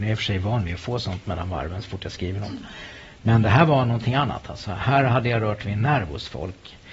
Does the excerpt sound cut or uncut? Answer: uncut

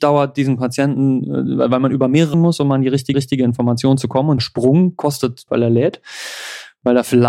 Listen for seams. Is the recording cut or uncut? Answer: cut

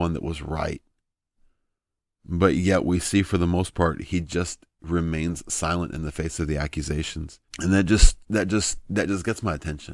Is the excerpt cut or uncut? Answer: cut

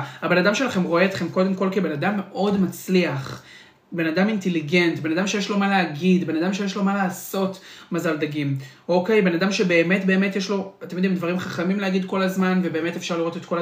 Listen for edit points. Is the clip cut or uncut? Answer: uncut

